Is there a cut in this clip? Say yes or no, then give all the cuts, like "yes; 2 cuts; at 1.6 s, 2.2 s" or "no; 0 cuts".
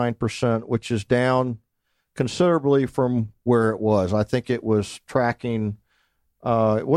no; 0 cuts